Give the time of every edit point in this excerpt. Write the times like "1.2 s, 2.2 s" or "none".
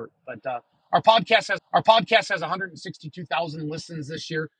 1.6 s

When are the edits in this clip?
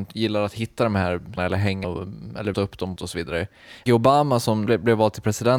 1.4 s, 1.8 s, 2.5 s, 3.0 s, 3.9 s, 4.7 s

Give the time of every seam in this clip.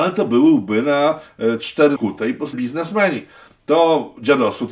2.0 s, 2.5 s

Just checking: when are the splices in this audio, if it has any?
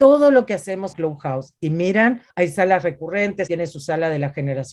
0.9 s, 1.6 s, 2.3 s, 3.5 s

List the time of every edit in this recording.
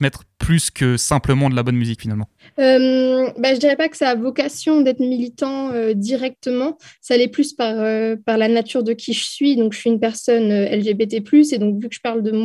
none

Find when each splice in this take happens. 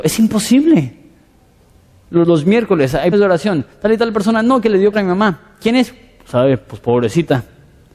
2.2 s, 3.1 s, 4.9 s, 6.3 s

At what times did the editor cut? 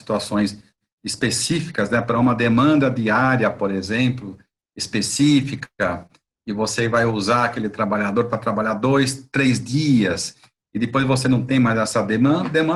none

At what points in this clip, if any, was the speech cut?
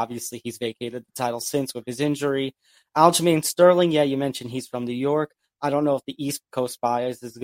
none

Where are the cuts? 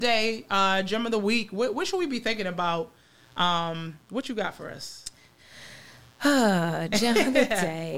none

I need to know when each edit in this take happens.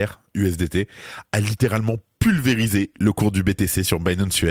none

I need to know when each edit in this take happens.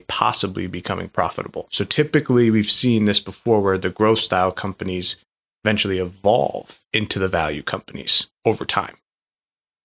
6.8 s

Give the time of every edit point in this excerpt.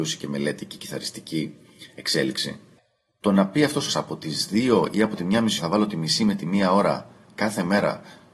3.9 s, 5.6 s

